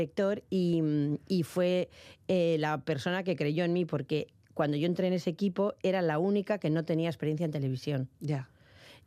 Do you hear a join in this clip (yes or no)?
no